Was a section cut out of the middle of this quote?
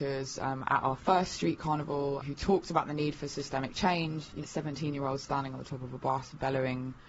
yes; 2 cuts; at 2.2 s, 4.4 s

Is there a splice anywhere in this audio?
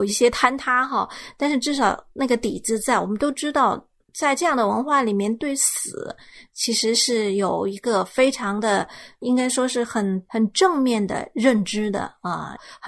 no; 0 cuts

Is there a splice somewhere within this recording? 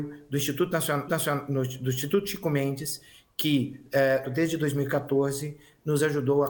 yes; 2 cuts; at 1.1 s, 4.2 s

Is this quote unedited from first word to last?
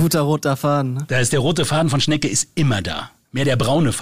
yes; 0 cuts

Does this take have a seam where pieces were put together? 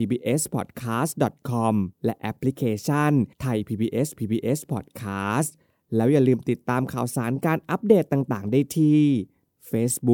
yes; 3 cuts; at 1.9 s, 3.3 s, 4.2 s

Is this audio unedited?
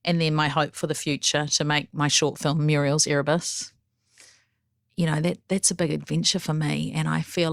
yes; 0 cuts

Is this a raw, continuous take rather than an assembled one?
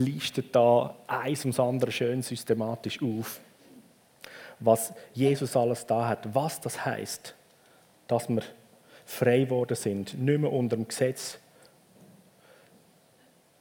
yes; 0 cuts

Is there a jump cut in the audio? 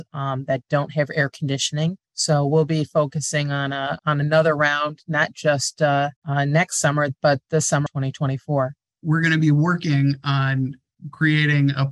yes; 4 cuts; at 2.0 s, 4.0 s, 6.2 s, 7.9 s

